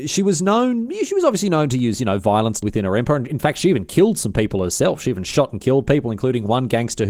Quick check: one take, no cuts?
no; 1 cut; at 2.6 s

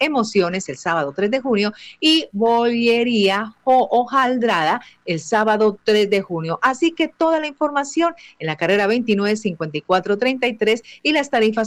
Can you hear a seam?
no; 0 cuts

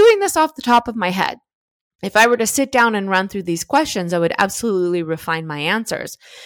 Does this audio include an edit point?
no; 0 cuts

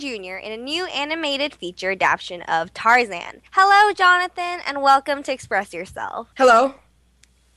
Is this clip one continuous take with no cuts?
no; 2 cuts; at 3.5 s, 6.3 s

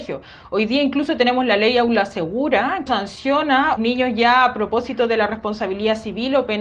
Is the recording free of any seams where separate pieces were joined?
no; 2 cuts; at 2.9 s, 3.8 s

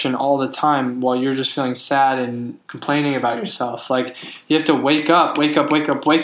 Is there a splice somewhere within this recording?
yes; 1 cut; at 2.6 s

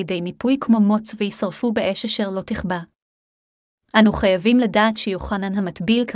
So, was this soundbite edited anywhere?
no; 0 cuts

